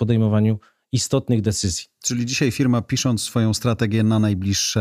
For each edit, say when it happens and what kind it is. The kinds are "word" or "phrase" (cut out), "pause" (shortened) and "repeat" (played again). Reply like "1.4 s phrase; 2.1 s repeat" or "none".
none